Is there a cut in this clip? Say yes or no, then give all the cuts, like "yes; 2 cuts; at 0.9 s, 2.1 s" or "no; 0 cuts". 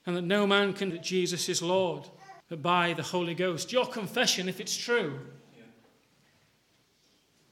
yes; 2 cuts; at 0.9 s, 2.4 s